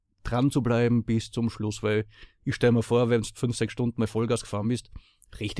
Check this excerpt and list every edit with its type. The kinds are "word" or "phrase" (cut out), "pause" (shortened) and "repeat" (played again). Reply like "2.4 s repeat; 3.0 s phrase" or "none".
none